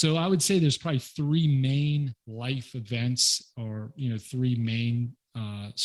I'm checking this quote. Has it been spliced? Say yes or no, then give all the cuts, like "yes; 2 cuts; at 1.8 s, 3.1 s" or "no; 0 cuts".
yes; 1 cut; at 2.2 s